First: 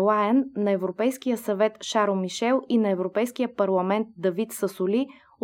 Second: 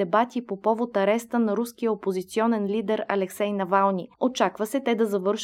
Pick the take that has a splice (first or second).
second